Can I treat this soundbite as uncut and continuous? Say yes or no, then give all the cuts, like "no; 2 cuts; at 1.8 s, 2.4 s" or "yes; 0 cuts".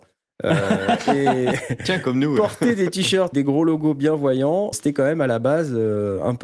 no; 2 cuts; at 3.3 s, 4.7 s